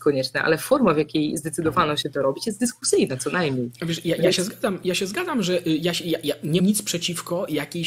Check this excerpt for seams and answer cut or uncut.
cut